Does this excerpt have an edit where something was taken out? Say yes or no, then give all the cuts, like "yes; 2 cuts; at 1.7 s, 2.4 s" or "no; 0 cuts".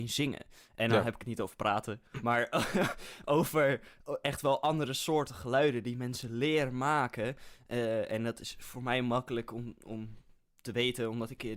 no; 0 cuts